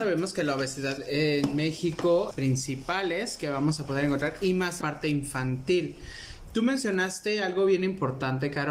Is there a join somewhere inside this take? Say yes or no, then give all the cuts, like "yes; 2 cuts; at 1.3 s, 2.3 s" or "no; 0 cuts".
yes; 2 cuts; at 2.3 s, 4.8 s